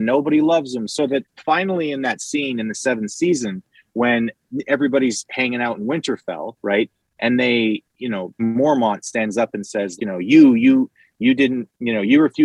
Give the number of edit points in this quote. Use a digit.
2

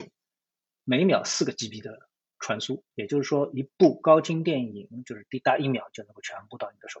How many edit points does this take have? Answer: 1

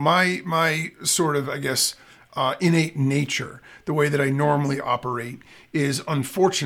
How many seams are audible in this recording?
0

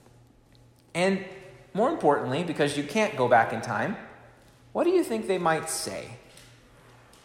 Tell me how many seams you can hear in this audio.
0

